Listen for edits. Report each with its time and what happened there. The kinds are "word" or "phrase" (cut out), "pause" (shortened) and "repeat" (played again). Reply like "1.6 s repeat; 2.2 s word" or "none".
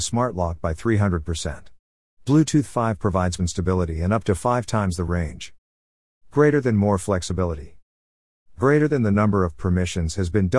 3.4 s phrase